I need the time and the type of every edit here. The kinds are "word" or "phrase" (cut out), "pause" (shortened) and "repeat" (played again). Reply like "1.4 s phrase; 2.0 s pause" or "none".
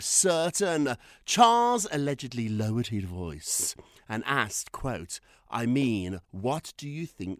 6.2 s pause